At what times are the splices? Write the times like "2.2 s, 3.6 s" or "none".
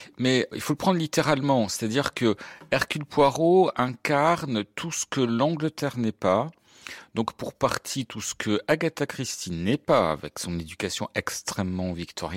none